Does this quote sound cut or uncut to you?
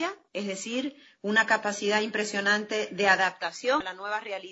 uncut